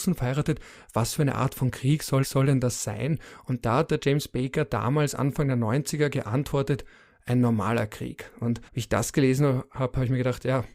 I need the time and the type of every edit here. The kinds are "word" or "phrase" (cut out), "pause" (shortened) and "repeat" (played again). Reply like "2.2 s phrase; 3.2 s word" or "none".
2.2 s repeat; 8.7 s pause